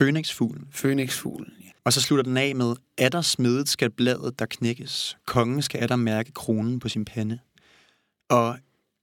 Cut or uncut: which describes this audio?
cut